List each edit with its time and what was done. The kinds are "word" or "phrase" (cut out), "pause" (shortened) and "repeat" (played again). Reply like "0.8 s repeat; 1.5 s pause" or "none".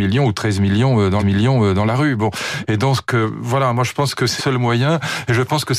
1.2 s repeat; 4.4 s word